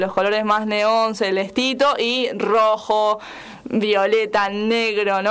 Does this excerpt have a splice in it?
no; 0 cuts

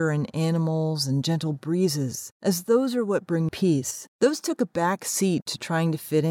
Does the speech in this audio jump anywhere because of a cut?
yes; 3 cuts; at 2.3 s, 3.5 s, 4.1 s

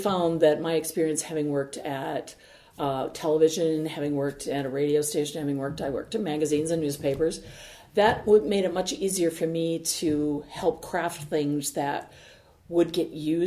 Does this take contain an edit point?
no; 0 cuts

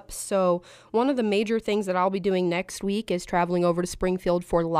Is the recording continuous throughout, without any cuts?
yes; 0 cuts

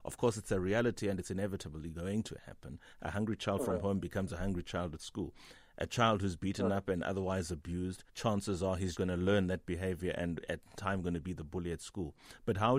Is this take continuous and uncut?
no; 2 cuts; at 8.1 s, 8.9 s

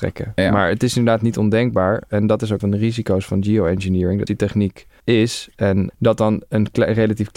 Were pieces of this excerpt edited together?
yes; 4 cuts; at 2.6 s, 4.3 s, 5.0 s, 5.9 s

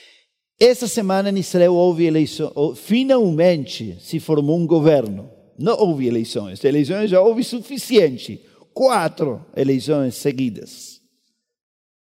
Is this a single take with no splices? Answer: yes; 0 cuts

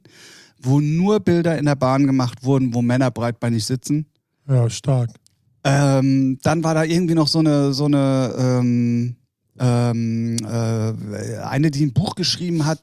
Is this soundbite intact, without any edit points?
yes; 0 cuts

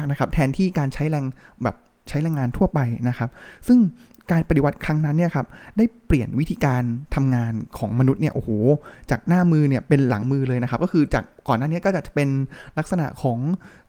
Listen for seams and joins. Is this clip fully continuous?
yes; 0 cuts

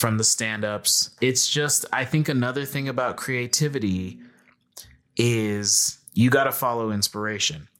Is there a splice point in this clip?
yes; 1 cut; at 6.1 s

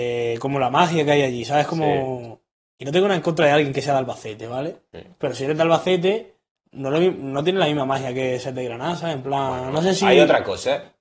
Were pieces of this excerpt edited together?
no; 0 cuts

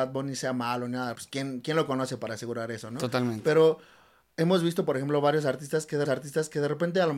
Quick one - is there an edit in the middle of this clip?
yes; 2 cuts; at 1.1 s, 6.0 s

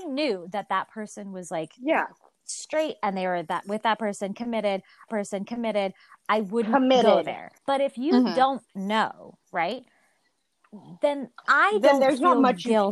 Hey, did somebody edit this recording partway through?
yes; 3 cuts; at 5.1 s, 7.6 s, 9.4 s

